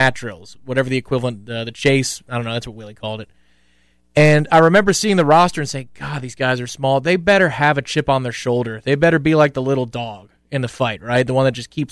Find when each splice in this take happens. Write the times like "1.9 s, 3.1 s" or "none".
none

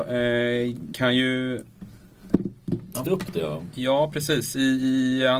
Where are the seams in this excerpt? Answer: 0.9 s, 3.0 s

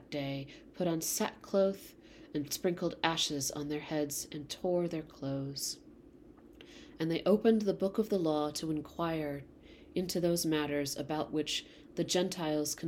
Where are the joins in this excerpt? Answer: none

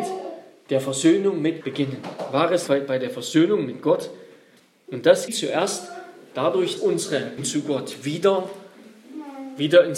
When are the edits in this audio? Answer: 1.6 s, 2.7 s, 4.6 s, 5.3 s, 6.8 s, 7.4 s

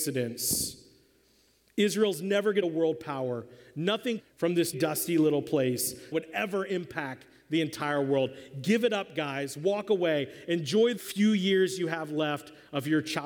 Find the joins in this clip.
2.6 s, 4.2 s, 4.7 s, 6.1 s, 11.0 s

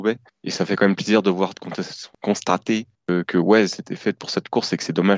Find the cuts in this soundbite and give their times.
none

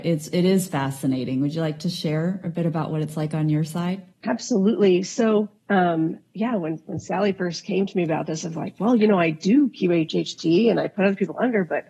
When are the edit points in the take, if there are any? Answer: 4.1 s, 5.6 s

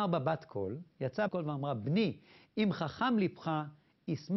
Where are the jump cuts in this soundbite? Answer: 1.3 s

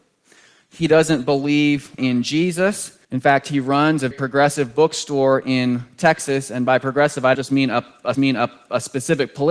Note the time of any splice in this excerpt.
2.0 s, 3.0 s, 4.1 s, 7.3 s, 8.1 s

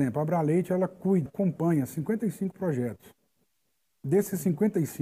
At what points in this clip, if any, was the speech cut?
1.3 s

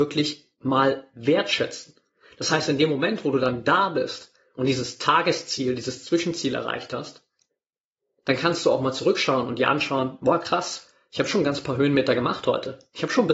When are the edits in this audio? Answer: none

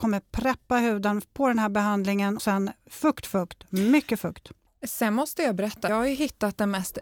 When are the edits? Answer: 2.4 s, 3.2 s, 5.9 s

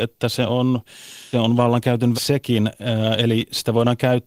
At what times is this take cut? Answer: 1.3 s, 2.1 s

